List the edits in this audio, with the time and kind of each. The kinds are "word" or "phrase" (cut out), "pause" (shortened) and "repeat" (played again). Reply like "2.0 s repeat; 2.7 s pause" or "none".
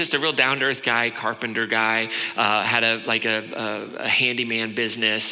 none